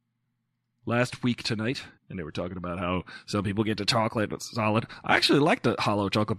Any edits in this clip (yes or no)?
yes